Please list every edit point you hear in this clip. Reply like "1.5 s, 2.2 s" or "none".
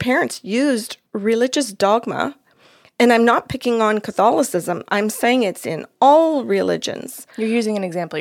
1.1 s